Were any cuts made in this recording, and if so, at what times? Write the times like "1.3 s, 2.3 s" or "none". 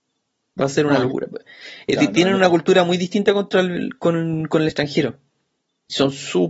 none